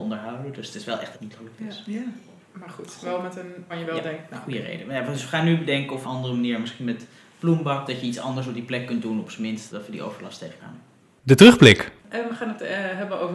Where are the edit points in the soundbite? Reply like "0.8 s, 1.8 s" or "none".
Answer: 1.1 s, 2.4 s, 3.7 s, 6.0 s, 7.9 s, 9.7 s, 10.6 s, 12.0 s